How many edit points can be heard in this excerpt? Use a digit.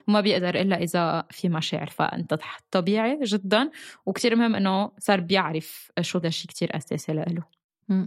2